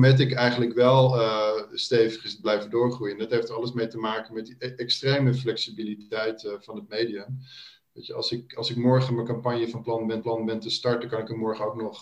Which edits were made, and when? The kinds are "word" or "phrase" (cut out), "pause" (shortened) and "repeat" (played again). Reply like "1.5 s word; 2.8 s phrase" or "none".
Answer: 10.2 s repeat